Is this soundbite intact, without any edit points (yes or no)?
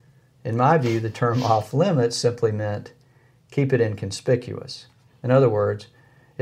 yes